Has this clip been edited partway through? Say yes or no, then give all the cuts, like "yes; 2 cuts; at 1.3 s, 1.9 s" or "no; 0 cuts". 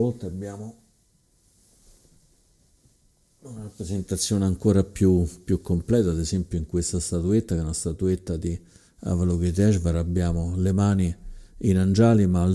no; 0 cuts